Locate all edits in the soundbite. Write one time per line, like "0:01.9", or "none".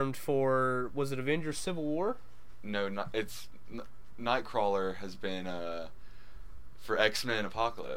none

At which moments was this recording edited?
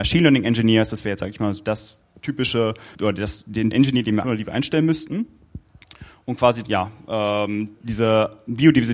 0:02.9
0:03.7
0:04.2
0:06.6
0:07.7

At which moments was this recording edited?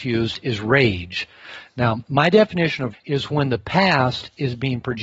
0:02.9

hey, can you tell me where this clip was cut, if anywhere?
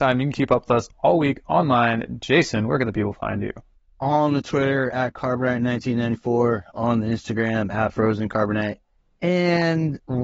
none

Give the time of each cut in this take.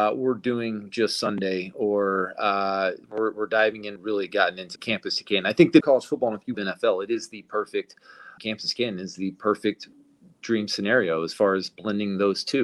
0:03.0
0:04.0
0:04.8
0:05.8
0:06.5
0:08.4

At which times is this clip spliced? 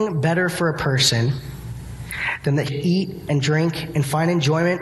0:02.7

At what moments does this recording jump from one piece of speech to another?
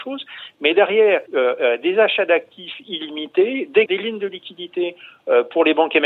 0:01.3
0:03.9

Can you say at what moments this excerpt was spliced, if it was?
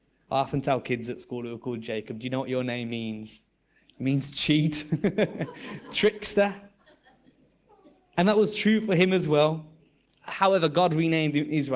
none

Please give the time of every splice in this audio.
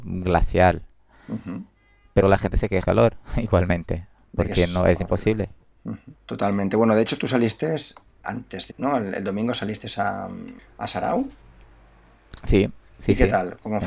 0:02.2
0:02.8
0:06.1
0:08.2
0:08.7
0:10.6

